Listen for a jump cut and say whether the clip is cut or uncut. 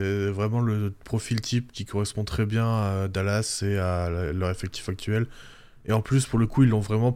uncut